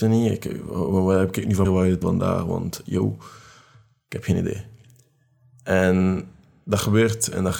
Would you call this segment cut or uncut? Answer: cut